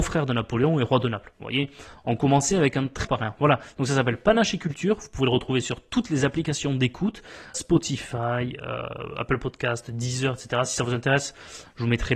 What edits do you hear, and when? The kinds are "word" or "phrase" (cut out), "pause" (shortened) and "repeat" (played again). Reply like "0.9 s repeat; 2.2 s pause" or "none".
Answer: 3.0 s word; 7.5 s word